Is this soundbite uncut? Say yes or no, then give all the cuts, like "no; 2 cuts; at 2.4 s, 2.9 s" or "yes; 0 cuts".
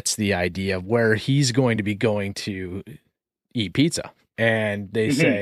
yes; 0 cuts